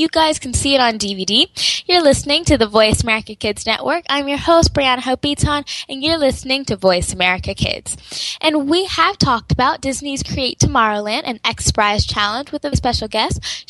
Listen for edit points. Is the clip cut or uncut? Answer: cut